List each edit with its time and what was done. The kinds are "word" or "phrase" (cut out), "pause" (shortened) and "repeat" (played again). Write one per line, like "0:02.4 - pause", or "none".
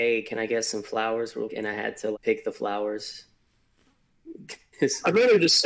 0:01.5 - word
0:02.1 - word

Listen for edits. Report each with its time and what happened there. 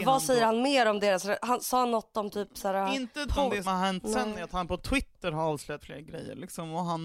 0:03.3 - word
0:03.6 - word
0:05.8 - word

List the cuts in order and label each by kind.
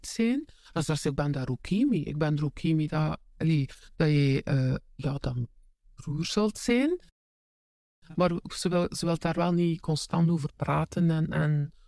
none

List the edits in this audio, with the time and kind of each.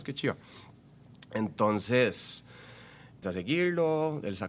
0:03.2 - word

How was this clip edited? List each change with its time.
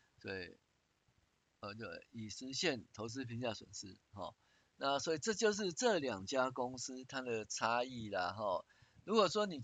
none

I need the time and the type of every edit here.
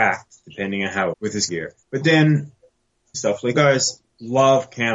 0:01.1 - phrase
0:01.5 - word
0:01.8 - pause
0:03.1 - phrase
0:03.5 - word

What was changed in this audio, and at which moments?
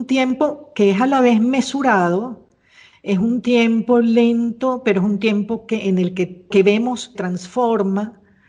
0:06.5 - word
0:07.2 - word

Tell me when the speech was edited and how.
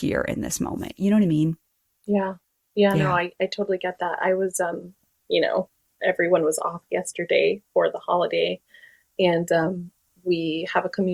none

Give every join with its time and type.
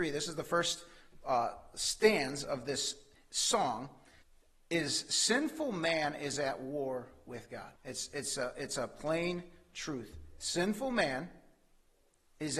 0:04.2 - pause
0:07.8 - pause

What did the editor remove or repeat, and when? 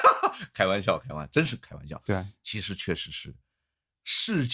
none

